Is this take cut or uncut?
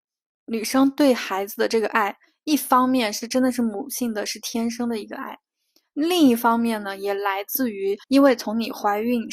cut